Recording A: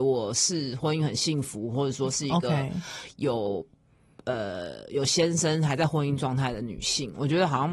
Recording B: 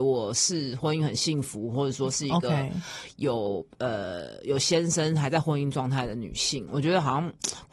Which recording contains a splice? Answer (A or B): B